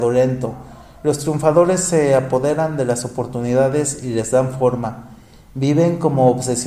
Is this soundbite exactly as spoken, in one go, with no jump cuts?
yes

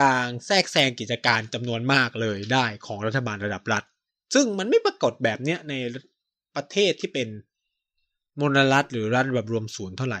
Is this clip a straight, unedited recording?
yes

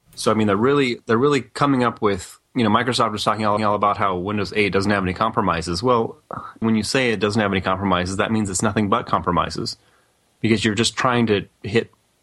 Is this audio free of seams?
no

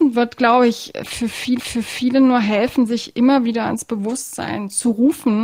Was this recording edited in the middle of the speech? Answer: yes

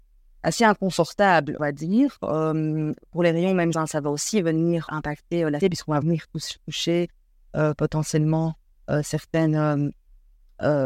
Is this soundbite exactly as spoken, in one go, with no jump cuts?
no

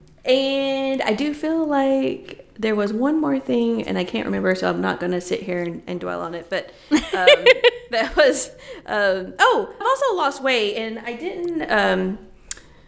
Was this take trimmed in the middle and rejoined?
yes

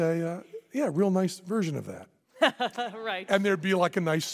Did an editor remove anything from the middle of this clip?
no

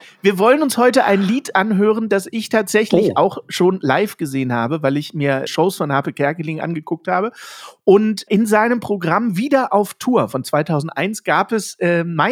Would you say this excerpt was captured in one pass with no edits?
no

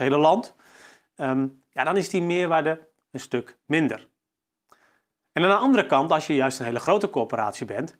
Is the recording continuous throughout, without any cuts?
no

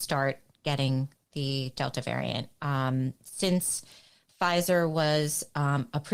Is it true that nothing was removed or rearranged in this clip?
yes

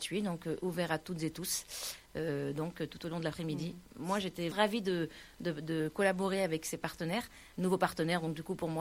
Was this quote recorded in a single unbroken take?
no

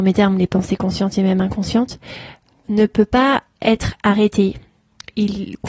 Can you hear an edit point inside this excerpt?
no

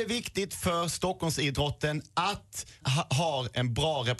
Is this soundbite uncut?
no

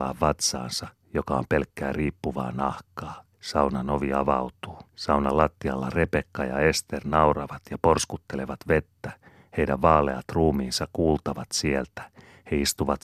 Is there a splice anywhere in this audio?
yes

